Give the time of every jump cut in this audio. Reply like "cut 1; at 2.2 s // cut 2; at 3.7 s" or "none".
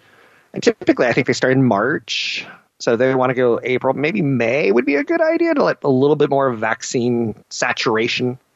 cut 1; at 7.4 s